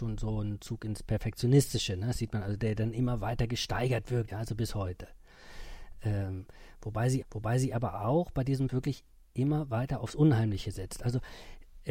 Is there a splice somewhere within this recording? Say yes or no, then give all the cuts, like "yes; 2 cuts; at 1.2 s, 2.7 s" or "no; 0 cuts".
yes; 3 cuts; at 4.3 s, 7.2 s, 8.7 s